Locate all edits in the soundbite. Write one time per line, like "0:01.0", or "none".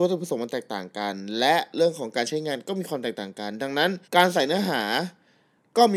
0:04.0